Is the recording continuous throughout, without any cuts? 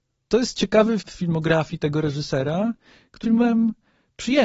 no; 2 cuts; at 1.0 s, 3.2 s

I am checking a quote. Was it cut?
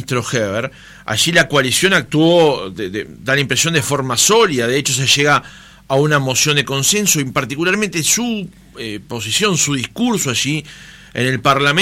no; 0 cuts

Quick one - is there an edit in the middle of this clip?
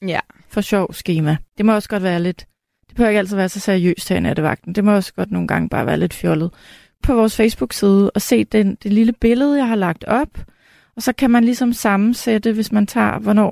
yes; 2 cuts; at 1.5 s, 7.0 s

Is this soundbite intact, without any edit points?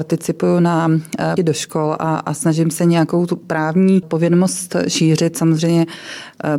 no; 2 cuts; at 1.4 s, 4.0 s

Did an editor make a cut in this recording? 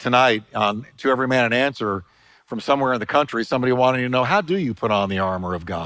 no; 0 cuts

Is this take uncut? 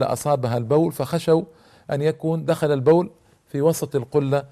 yes; 0 cuts

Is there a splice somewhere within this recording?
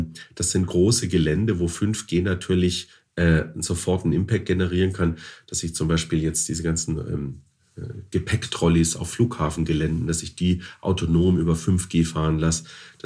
no; 0 cuts

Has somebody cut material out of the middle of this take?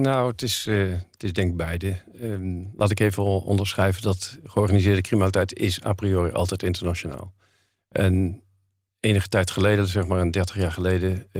no; 0 cuts

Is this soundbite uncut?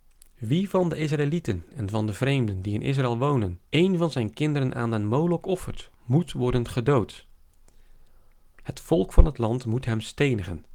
no; 1 cut; at 3.6 s

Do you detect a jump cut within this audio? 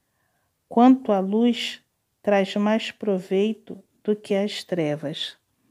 no; 0 cuts

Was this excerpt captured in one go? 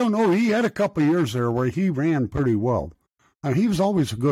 yes; 0 cuts

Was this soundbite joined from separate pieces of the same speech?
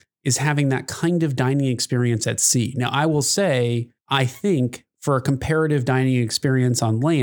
no; 0 cuts

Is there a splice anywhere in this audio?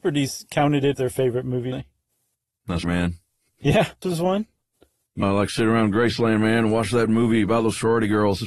yes; 5 cuts; at 0.9 s, 1.7 s, 2.8 s, 4.0 s, 5.2 s

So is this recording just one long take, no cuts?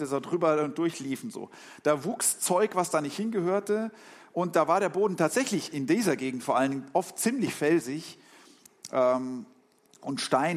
yes; 0 cuts

